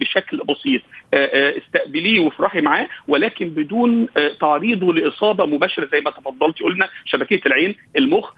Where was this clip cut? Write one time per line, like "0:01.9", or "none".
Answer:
none